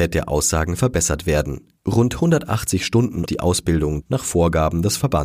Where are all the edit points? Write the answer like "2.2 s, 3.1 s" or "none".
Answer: 1.8 s, 3.3 s, 4.0 s